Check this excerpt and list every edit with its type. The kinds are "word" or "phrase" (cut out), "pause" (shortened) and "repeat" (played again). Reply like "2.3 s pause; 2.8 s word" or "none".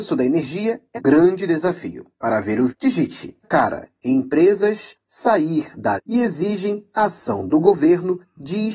1.0 s word; 2.7 s word; 3.4 s word; 5.0 s word; 6.0 s word